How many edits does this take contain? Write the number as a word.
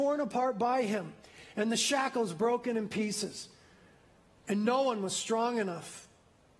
zero